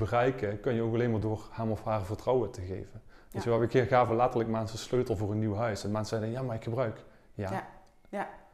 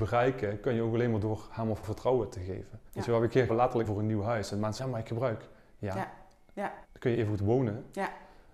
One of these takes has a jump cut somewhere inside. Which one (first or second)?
second